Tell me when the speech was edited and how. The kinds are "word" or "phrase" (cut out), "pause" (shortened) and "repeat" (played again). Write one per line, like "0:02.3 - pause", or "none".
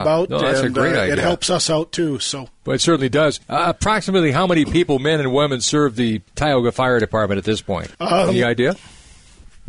0:03.4 - pause
0:06.3 - pause
0:07.9 - pause